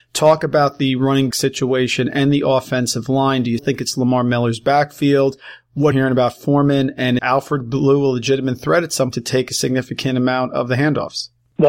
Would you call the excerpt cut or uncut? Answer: cut